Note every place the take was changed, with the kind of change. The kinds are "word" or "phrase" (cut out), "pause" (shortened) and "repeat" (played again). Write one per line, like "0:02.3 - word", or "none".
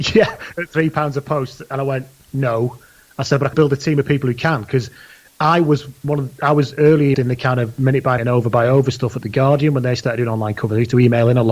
0:03.5 - word
0:07.1 - word
0:08.2 - word